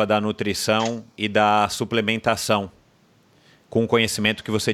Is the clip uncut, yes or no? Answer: yes